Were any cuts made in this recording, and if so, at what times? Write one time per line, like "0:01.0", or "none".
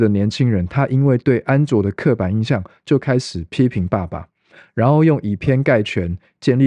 none